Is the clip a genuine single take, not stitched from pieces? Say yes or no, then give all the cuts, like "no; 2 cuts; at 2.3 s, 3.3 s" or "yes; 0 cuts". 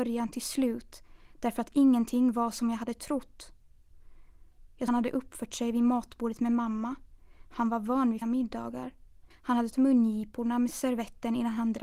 no; 4 cuts; at 4.9 s, 8.2 s, 9.3 s, 9.7 s